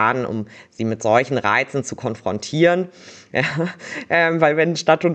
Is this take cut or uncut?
uncut